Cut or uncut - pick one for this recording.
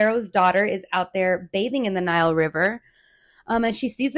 uncut